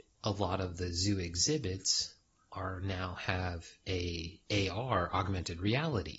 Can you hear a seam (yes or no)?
no